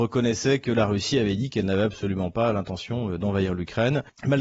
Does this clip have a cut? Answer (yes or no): no